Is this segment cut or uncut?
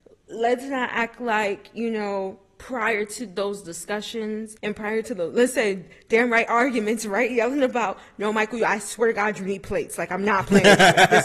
cut